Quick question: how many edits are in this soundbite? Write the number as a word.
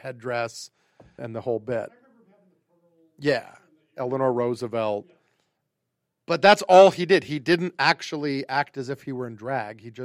one